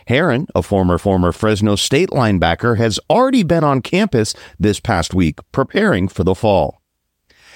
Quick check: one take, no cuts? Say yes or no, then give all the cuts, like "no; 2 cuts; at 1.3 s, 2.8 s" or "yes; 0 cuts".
no; 1 cut; at 1.0 s